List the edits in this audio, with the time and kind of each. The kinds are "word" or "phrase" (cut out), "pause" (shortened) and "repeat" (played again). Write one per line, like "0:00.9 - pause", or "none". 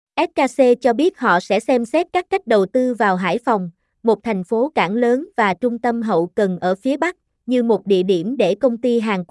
none